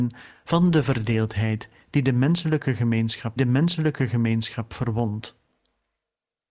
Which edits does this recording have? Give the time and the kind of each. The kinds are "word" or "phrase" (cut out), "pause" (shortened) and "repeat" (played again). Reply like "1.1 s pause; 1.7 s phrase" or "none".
3.4 s repeat